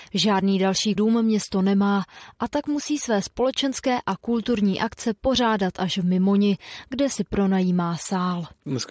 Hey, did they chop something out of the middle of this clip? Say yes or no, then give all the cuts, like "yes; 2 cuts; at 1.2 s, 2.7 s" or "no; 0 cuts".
yes; 1 cut; at 1.0 s